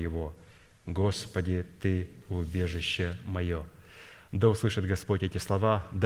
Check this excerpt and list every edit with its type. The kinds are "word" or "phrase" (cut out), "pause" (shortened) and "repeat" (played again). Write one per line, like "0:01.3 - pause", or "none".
none